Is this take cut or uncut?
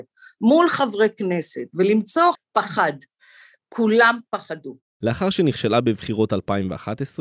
cut